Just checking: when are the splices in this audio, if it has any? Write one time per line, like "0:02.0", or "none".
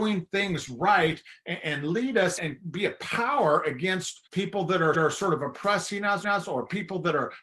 0:02.4
0:04.3
0:04.9
0:06.2